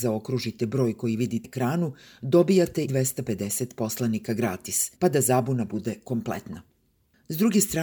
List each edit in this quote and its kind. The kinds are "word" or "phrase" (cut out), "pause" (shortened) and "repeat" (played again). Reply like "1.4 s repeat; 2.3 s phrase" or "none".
1.4 s word; 2.9 s word; 4.9 s pause